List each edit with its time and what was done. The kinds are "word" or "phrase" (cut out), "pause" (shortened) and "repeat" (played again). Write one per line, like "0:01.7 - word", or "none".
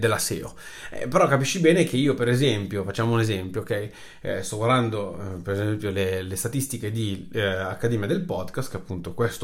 none